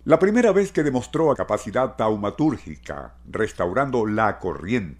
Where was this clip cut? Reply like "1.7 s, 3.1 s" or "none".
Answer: 1.3 s